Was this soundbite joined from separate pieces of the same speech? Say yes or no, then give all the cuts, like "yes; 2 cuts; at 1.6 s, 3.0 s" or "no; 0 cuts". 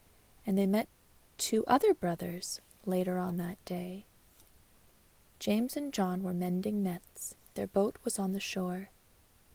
no; 0 cuts